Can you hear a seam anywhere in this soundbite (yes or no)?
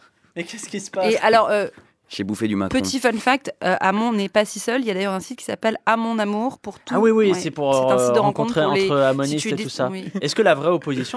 no